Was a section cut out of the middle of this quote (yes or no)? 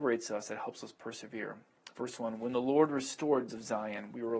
yes